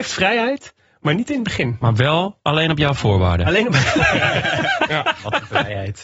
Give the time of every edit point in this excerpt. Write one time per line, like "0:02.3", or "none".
none